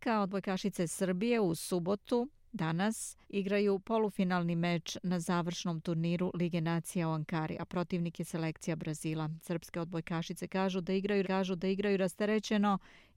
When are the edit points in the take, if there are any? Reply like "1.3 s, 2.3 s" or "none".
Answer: 3.2 s, 11.2 s